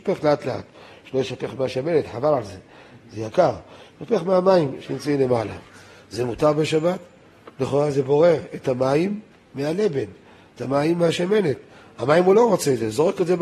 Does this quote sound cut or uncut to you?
uncut